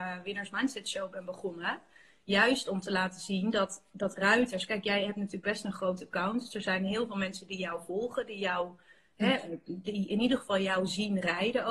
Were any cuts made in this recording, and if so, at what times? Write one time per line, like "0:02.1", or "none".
none